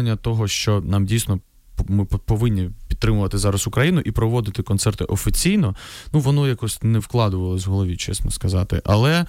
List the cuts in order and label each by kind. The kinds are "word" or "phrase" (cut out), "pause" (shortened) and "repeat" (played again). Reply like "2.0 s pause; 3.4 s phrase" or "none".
none